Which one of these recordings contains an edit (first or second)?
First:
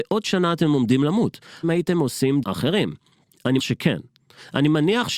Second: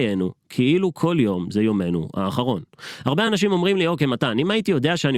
first